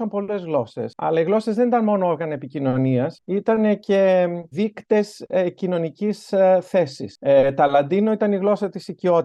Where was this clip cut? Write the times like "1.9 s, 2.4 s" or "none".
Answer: none